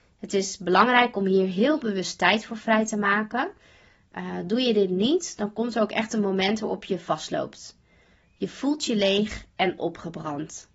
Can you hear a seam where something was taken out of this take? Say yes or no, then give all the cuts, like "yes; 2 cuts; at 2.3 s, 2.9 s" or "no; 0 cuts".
no; 0 cuts